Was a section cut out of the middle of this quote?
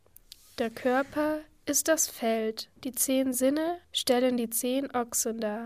yes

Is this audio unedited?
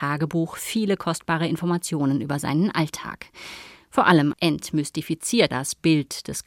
no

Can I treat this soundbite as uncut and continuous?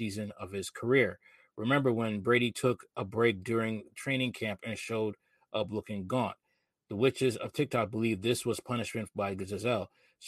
yes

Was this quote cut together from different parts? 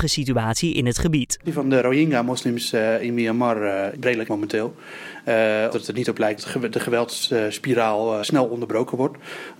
yes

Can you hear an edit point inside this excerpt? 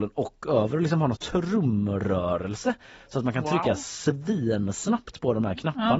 yes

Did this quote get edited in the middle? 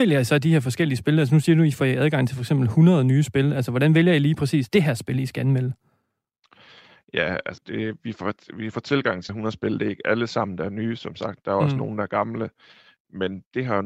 yes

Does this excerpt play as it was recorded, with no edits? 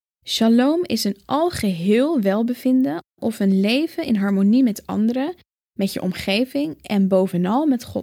yes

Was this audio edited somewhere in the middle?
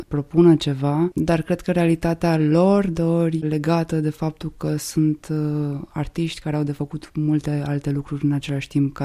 yes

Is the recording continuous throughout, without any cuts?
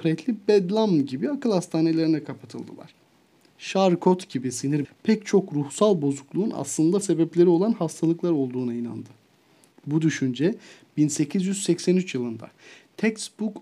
no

